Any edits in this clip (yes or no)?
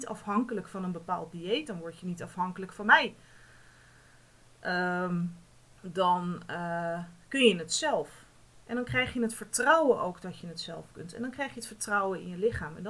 yes